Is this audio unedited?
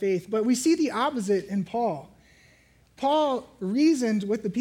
yes; 0 cuts

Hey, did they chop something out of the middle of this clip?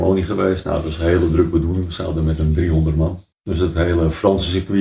yes; 1 cut; at 3.3 s

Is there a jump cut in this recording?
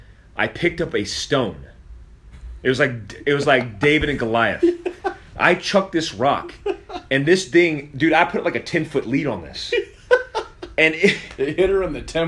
no; 0 cuts

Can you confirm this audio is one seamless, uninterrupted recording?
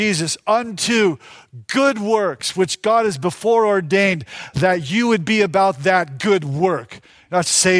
yes; 0 cuts

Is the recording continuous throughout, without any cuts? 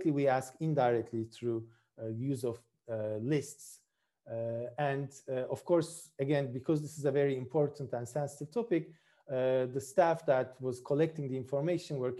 yes; 0 cuts

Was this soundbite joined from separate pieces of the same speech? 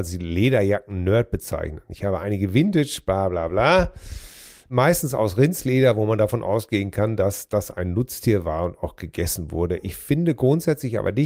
no; 0 cuts

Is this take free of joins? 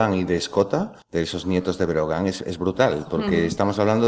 no; 1 cut; at 1.0 s

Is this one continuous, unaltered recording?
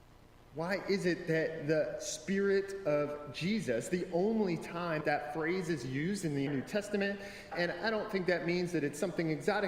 no; 3 cuts; at 5.0 s, 6.5 s, 7.5 s

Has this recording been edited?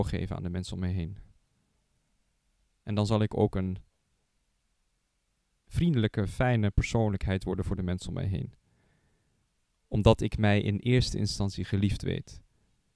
no; 0 cuts

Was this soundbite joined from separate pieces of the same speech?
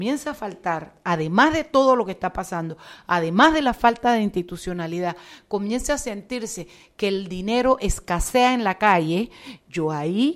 no; 0 cuts

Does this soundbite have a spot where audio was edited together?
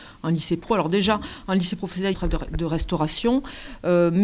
yes; 1 cut; at 2.1 s

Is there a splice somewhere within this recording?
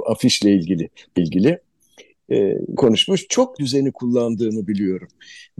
yes; 3 cuts; at 1.2 s, 2.8 s, 3.6 s

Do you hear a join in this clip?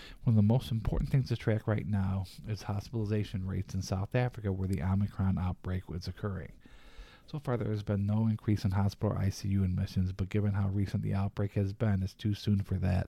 no; 0 cuts

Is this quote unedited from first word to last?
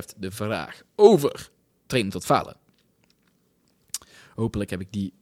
yes; 0 cuts

